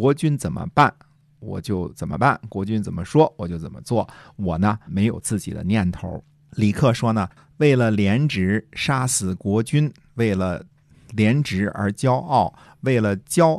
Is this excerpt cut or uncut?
cut